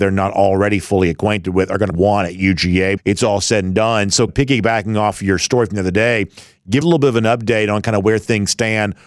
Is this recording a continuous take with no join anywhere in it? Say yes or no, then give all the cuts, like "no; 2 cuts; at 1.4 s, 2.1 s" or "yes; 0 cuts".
no; 4 cuts; at 1.9 s, 3.0 s, 4.3 s, 6.8 s